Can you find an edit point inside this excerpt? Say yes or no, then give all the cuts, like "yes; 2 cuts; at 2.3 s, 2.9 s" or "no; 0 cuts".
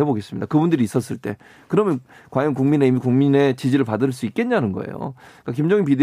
no; 0 cuts